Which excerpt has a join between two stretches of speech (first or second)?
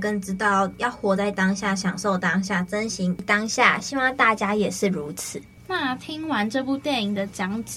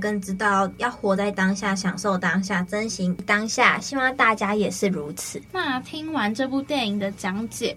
second